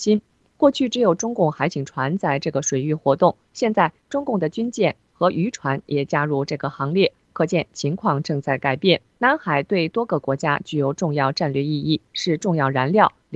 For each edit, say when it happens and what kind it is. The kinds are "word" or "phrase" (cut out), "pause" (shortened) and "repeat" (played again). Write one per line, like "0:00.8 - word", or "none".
0:03.5 - pause
0:05.0 - pause
0:09.1 - pause

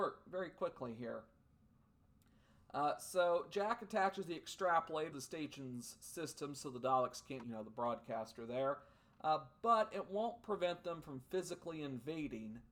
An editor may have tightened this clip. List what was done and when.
0:05.1 - word
0:07.4 - phrase

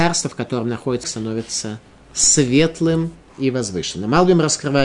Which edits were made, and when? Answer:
0:01.0 - word

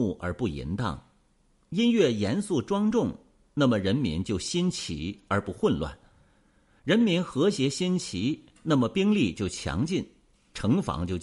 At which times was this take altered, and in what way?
none

